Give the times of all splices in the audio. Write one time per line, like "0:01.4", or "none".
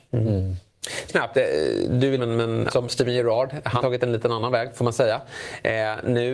0:01.1
0:02.2
0:02.7
0:03.8

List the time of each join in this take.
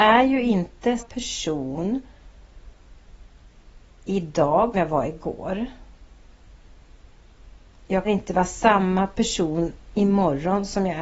0:01.0
0:04.7
0:08.0

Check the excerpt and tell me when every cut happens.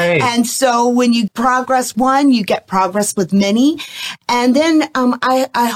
0:01.3
0:01.9

